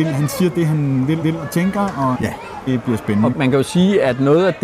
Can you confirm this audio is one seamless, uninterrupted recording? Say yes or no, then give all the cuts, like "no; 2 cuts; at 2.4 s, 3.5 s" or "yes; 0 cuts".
no; 4 cuts; at 1.2 s, 2.1 s, 2.7 s, 3.3 s